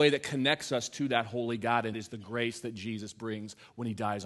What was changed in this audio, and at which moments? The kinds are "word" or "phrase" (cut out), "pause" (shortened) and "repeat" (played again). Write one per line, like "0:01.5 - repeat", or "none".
0:01.9 - word